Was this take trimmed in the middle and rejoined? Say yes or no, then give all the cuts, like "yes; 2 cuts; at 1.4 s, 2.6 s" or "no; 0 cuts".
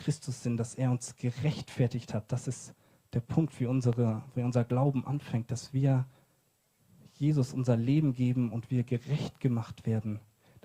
no; 0 cuts